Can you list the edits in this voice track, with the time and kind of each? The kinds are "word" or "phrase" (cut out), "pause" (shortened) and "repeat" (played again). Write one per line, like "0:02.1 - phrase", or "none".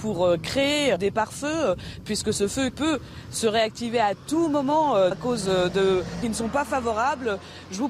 0:01.0 - word
0:02.7 - word
0:05.1 - word
0:06.2 - phrase